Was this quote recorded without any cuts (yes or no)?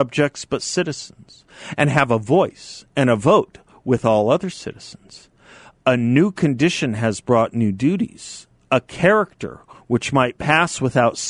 yes